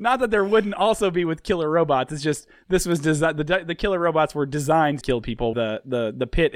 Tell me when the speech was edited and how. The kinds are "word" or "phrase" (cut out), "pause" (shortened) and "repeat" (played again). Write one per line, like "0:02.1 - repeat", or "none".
0:05.0 - word
0:05.5 - word